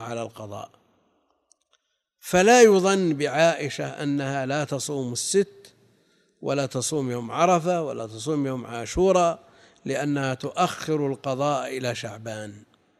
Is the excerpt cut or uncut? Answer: uncut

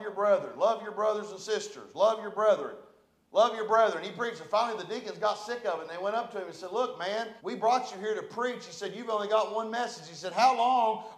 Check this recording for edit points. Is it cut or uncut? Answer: cut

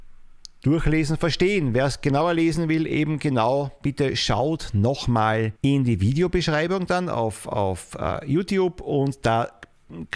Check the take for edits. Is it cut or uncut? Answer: cut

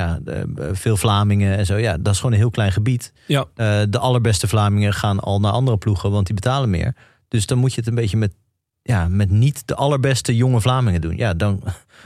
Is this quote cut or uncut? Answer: uncut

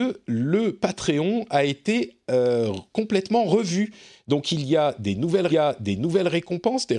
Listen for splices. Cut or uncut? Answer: cut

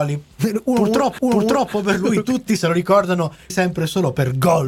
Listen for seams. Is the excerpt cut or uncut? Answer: cut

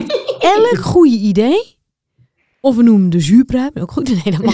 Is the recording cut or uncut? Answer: uncut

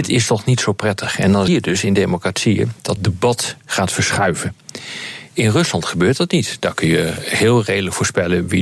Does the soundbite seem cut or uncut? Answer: cut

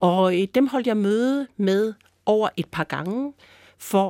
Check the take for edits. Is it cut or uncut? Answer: uncut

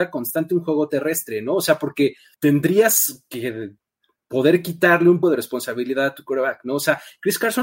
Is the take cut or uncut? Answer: cut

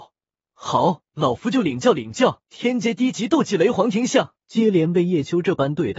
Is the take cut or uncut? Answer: cut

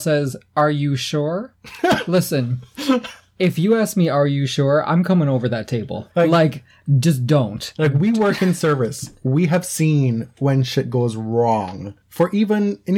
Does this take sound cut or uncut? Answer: cut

